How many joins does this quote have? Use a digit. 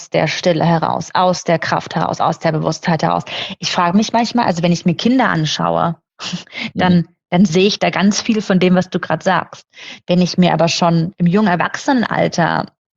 0